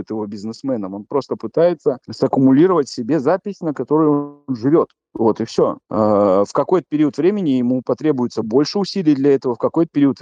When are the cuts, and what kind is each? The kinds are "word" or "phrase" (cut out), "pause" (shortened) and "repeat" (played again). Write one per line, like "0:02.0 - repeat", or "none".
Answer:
0:02.0 - pause
0:05.8 - pause